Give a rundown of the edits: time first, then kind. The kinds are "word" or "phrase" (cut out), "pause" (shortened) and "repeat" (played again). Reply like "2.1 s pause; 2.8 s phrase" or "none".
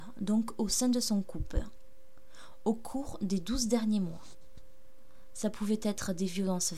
none